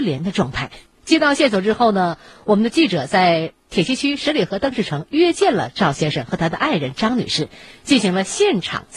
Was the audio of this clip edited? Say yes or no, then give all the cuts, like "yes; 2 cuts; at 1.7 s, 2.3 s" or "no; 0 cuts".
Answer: no; 0 cuts